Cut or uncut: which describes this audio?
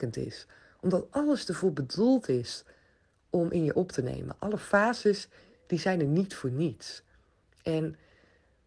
uncut